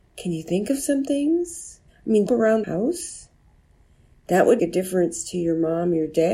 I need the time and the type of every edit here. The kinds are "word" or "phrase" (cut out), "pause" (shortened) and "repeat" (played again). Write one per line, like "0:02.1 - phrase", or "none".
0:01.9 - pause
0:02.3 - phrase
0:02.6 - word
0:04.6 - word